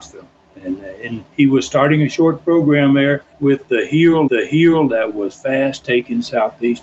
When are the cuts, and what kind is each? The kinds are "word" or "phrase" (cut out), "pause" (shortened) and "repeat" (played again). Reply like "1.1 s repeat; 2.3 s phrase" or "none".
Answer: 3.3 s pause; 4.3 s repeat